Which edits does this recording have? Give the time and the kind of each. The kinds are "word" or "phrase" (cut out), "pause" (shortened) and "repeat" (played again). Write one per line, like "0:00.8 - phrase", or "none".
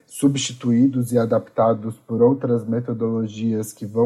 none